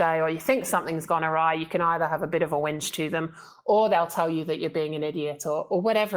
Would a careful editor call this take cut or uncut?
uncut